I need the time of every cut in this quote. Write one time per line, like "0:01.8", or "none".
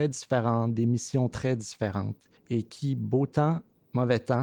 0:02.4